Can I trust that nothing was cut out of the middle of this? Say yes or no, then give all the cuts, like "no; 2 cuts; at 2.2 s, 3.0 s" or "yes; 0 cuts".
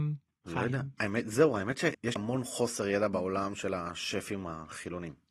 no; 1 cut; at 2.2 s